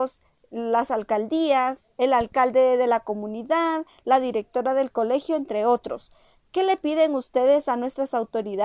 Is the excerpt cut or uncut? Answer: uncut